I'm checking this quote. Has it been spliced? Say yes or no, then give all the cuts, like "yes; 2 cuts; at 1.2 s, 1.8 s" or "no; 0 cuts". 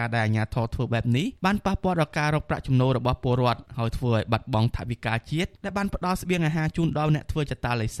yes; 3 cuts; at 1.4 s, 3.7 s, 5.6 s